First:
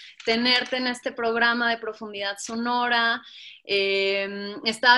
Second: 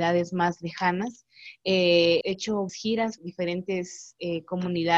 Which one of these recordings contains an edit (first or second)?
second